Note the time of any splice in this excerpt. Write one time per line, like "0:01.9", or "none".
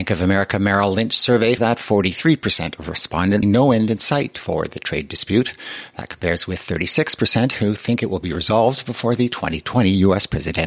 0:01.6
0:03.4